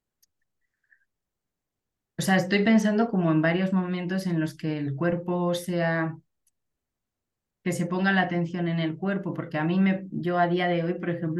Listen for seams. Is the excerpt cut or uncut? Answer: uncut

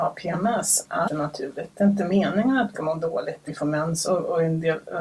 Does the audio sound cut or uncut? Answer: cut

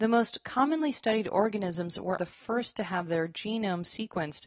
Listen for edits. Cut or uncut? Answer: cut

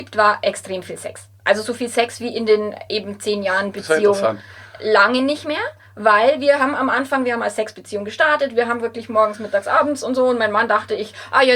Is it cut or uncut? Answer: uncut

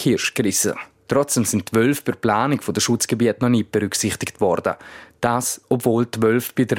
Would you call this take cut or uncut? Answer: uncut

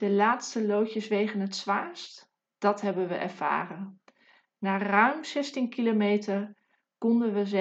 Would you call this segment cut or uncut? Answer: uncut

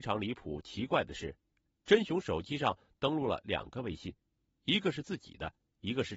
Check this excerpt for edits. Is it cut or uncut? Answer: uncut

